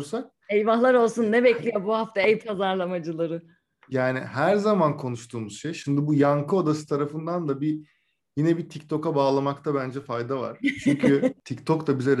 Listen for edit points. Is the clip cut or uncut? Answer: uncut